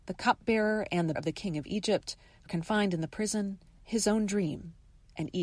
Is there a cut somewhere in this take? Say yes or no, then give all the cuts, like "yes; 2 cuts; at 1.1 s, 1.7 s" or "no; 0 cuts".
yes; 3 cuts; at 1.1 s, 2.5 s, 3.8 s